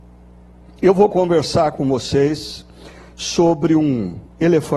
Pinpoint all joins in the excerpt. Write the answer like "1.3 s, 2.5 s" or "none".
none

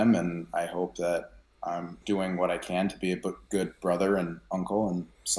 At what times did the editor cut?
2.0 s

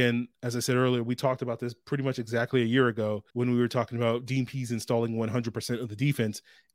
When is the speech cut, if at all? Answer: 3.3 s

